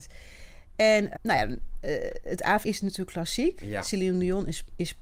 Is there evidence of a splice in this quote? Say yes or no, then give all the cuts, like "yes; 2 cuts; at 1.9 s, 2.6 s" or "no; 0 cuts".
yes; 2 cuts; at 1.1 s, 2.6 s